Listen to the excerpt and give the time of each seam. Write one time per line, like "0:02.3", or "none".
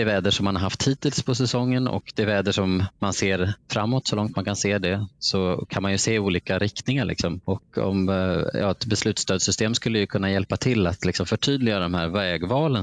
0:03.6
0:07.4